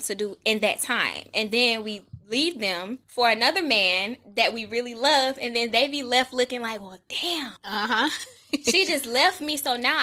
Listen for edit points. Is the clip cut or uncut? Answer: cut